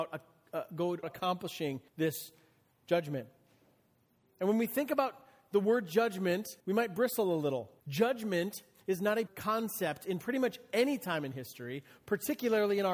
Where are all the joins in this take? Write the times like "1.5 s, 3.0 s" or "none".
1.0 s, 1.9 s, 6.6 s, 7.8 s, 9.3 s

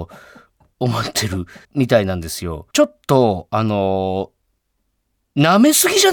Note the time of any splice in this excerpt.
1.6 s, 2.7 s

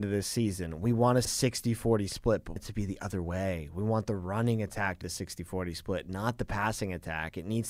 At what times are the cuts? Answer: 1.3 s, 2.6 s, 5.0 s

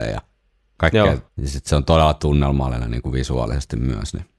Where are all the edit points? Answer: 1.3 s

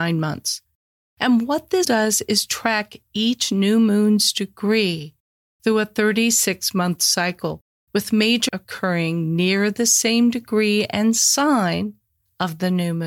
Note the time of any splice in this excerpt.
1.8 s, 8.5 s

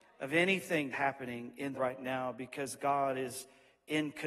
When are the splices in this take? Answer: 0.9 s, 1.7 s

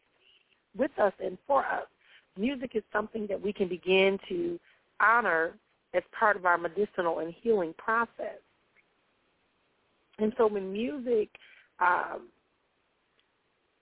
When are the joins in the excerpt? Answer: none

